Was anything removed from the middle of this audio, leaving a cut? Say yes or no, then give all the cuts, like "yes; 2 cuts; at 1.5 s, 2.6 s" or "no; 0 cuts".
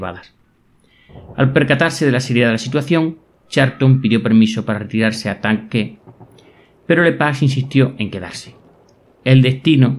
no; 0 cuts